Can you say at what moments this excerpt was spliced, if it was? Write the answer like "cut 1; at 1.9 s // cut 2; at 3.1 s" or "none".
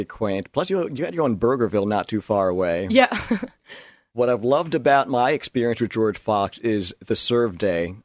none

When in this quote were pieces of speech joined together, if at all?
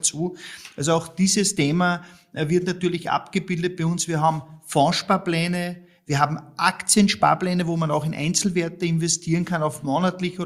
none

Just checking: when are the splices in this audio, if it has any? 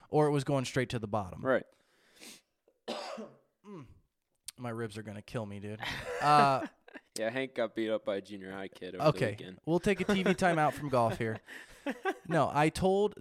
cut 1; at 7.1 s

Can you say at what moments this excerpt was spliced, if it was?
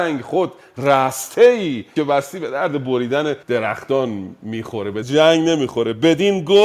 cut 1; at 2.0 s // cut 2; at 3.4 s // cut 3; at 5.0 s

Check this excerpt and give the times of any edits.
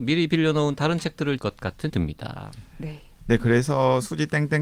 cut 1; at 1.4 s // cut 2; at 1.9 s

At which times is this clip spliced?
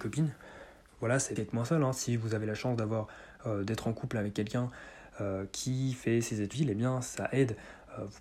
cut 1; at 1.4 s // cut 2; at 6.5 s

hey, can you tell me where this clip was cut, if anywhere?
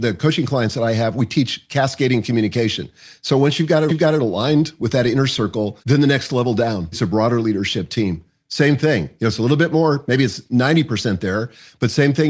cut 1; at 3.9 s // cut 2; at 5.8 s // cut 3; at 6.9 s

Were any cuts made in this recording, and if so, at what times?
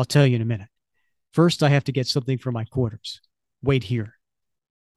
none

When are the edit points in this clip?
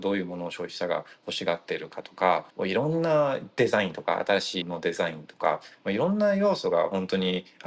cut 1; at 2.5 s // cut 2; at 4.6 s

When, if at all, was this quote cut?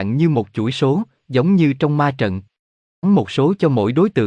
cut 1; at 3.0 s

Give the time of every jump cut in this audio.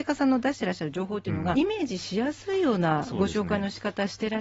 cut 1; at 1.5 s

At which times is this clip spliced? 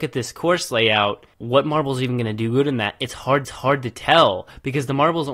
cut 1; at 1.3 s // cut 2; at 3.4 s

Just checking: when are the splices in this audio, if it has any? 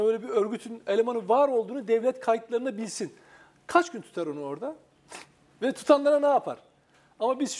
none

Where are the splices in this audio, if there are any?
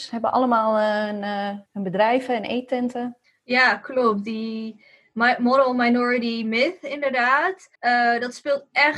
cut 1; at 1.7 s // cut 2; at 3.2 s // cut 3; at 7.7 s

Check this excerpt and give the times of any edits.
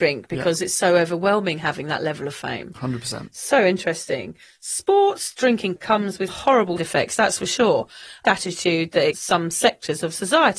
cut 1; at 4.4 s // cut 2; at 5.8 s // cut 3; at 6.3 s // cut 4; at 6.8 s // cut 5; at 8.2 s // cut 6; at 9.1 s

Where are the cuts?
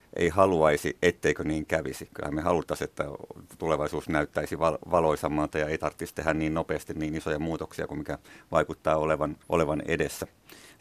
cut 1; at 9.4 s

